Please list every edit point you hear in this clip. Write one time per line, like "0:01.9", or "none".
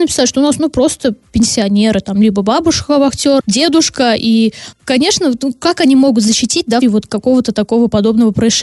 0:03.4
0:04.7
0:06.8